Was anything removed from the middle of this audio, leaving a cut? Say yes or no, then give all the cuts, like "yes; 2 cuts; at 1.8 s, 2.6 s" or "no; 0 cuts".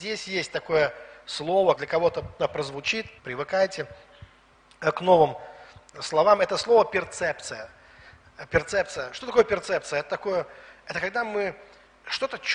yes; 4 cuts; at 1.7 s, 2.4 s, 3.2 s, 5.9 s